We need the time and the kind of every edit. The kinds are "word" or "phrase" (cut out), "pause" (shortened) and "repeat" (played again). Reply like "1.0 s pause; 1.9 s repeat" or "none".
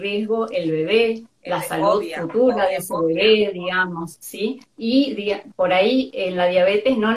4.7 s pause